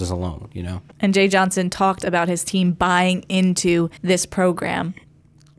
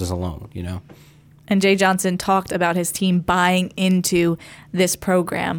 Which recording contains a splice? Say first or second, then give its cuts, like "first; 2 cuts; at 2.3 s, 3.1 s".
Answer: first; 2 cuts; at 0.9 s, 4.0 s